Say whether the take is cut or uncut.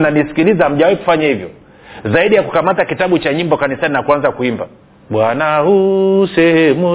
cut